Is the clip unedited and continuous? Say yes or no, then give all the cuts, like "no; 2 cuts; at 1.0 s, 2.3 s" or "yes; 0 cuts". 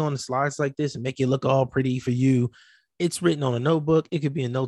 yes; 0 cuts